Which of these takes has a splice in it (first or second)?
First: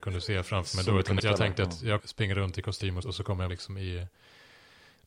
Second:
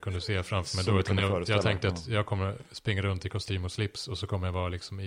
first